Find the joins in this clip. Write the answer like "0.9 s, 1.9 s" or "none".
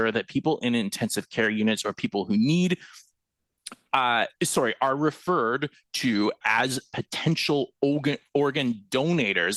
4.3 s, 6.4 s, 7.7 s